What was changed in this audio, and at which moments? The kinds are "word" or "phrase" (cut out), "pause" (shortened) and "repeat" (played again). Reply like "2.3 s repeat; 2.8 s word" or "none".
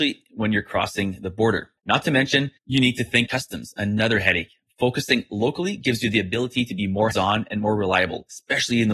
1.8 s pause; 2.6 s pause; 3.3 s word; 7.1 s word